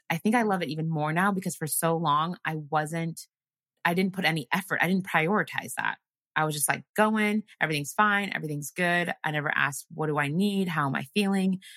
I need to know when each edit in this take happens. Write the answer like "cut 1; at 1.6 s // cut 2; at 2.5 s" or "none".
none